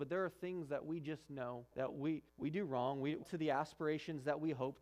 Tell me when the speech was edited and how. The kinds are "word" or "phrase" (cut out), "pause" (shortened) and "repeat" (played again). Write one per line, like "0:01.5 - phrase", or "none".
0:01.7 - pause
0:02.3 - pause
0:03.2 - phrase